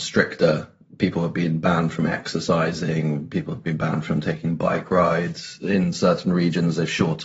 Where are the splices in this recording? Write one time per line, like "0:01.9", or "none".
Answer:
none

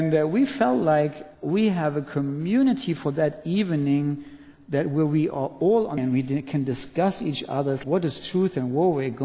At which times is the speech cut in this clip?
0:01.3
0:06.0
0:07.8

